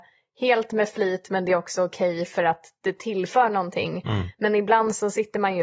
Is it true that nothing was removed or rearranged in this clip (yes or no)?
yes